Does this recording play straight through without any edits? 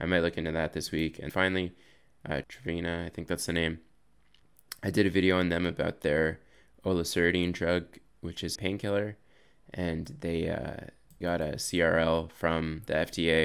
no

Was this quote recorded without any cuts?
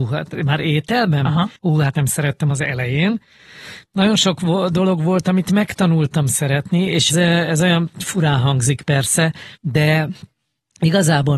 no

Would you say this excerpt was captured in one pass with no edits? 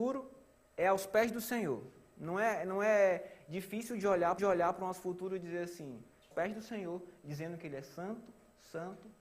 no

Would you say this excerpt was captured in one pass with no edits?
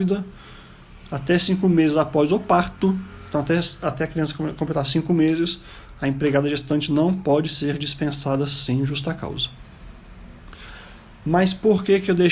yes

